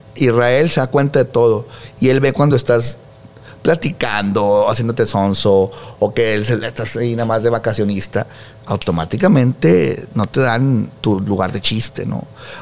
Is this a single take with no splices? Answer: yes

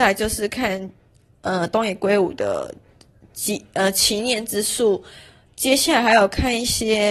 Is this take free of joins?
yes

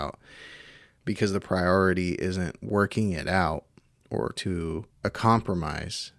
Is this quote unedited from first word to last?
no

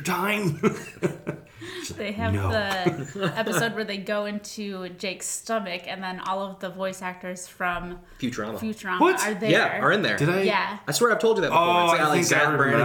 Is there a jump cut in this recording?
no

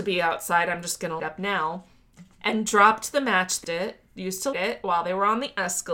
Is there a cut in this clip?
yes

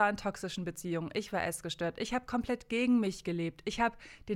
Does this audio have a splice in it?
no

